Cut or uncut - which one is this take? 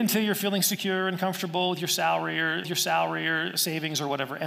cut